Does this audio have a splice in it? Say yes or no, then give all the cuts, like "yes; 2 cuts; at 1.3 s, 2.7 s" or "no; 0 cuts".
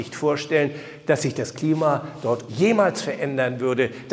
yes; 1 cut; at 2.5 s